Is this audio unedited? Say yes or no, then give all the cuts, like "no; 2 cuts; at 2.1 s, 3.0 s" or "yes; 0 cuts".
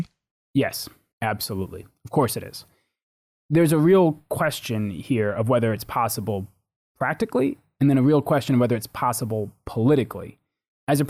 yes; 0 cuts